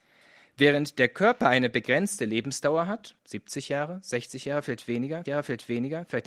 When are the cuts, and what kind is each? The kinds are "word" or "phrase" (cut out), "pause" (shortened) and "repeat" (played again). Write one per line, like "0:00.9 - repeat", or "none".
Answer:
0:03.2 - pause
0:05.3 - repeat